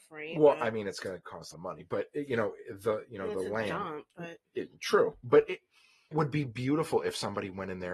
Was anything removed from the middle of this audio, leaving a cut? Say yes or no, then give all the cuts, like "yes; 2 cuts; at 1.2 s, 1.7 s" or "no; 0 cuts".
yes; 2 cuts; at 1.5 s, 6.1 s